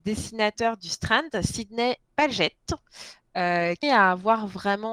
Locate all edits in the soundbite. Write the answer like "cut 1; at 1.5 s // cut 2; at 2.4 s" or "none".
cut 1; at 2.0 s // cut 2; at 3.8 s